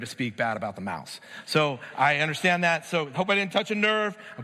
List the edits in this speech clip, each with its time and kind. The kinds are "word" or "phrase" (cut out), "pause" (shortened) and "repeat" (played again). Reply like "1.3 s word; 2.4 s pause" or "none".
3.1 s word